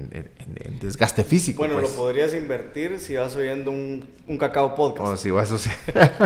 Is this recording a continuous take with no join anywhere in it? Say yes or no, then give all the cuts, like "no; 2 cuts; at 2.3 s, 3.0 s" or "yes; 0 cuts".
yes; 0 cuts